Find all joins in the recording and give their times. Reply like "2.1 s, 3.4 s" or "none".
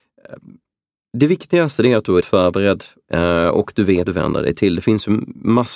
2.2 s, 4.1 s